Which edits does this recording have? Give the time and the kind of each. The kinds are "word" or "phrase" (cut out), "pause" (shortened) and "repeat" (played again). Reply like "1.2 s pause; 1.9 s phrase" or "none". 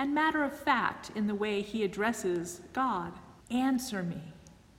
3.4 s pause